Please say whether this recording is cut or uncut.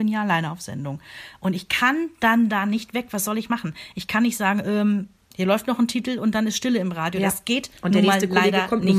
uncut